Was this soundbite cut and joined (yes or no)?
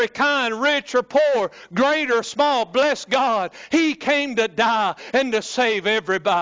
no